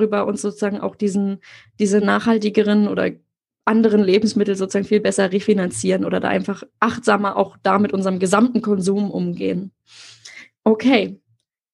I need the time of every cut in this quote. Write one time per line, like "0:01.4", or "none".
none